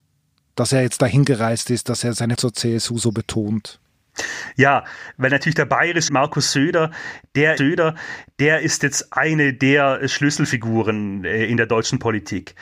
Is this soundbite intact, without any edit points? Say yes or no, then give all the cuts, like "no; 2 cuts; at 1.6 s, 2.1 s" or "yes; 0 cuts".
no; 3 cuts; at 2.4 s, 6.1 s, 7.6 s